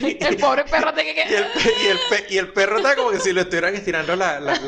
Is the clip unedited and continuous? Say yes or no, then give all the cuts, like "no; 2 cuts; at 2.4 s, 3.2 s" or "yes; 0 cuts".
yes; 0 cuts